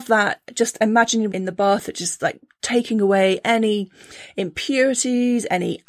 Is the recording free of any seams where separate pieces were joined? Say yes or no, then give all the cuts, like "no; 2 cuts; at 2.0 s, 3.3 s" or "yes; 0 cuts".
no; 2 cuts; at 1.3 s, 2.2 s